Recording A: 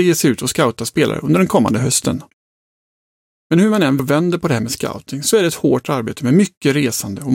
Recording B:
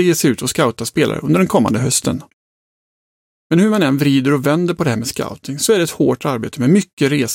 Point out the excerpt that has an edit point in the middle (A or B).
A